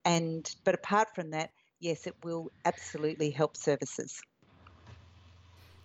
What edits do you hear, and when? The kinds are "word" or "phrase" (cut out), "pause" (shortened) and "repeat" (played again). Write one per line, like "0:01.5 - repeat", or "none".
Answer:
none